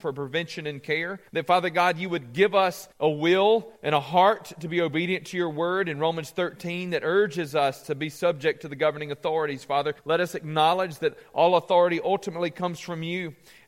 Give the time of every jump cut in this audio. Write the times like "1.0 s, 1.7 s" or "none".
1.3 s, 2.9 s, 3.8 s, 10.0 s